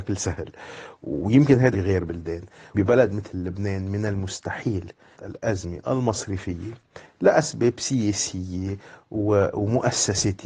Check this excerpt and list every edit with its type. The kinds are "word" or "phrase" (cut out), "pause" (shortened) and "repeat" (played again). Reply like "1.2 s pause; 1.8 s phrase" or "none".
1.7 s phrase; 2.7 s word; 5.1 s word